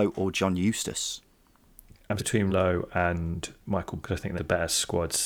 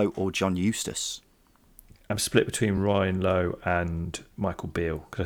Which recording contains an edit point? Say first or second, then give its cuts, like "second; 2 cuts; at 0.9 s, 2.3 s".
first; 4 cuts; at 2.2 s, 2.5 s, 4.0 s, 4.4 s